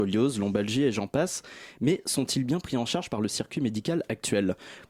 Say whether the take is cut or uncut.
uncut